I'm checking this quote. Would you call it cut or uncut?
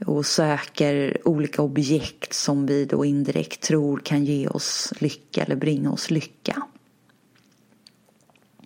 uncut